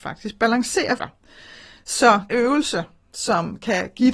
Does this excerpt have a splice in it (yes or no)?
yes